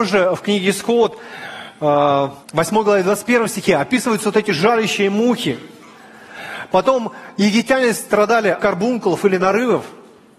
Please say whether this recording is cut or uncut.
cut